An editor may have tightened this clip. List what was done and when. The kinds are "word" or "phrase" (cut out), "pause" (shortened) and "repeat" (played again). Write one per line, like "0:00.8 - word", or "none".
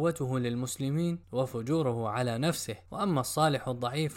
0:01.2 - pause
0:02.9 - pause